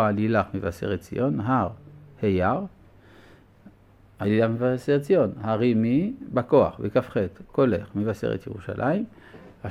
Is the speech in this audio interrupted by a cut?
no; 0 cuts

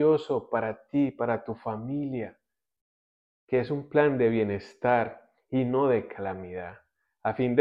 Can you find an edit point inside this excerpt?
no; 0 cuts

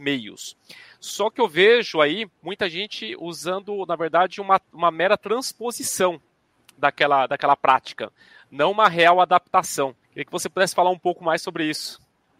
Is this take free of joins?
no; 1 cut; at 10.0 s

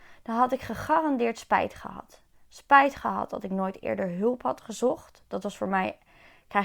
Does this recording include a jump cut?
no; 0 cuts

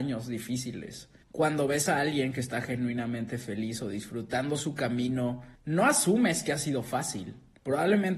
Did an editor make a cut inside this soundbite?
no; 0 cuts

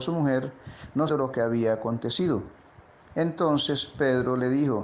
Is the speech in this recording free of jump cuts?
no; 1 cut; at 1.1 s

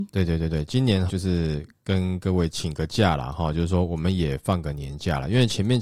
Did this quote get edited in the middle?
yes; 1 cut; at 1.1 s

